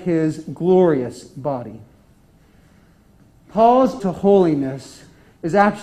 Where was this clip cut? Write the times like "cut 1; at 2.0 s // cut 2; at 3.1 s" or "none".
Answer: cut 1; at 4.0 s